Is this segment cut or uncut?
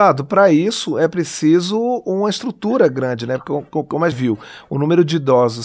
cut